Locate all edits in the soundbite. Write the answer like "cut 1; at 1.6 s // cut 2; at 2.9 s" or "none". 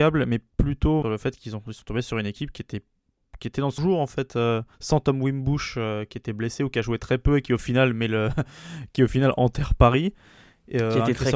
cut 1; at 1.0 s // cut 2; at 3.8 s // cut 3; at 4.7 s